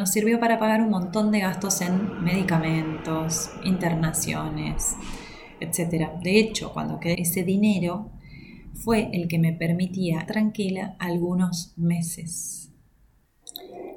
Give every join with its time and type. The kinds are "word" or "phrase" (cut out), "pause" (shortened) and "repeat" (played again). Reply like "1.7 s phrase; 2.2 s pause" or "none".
7.1 s word; 10.3 s word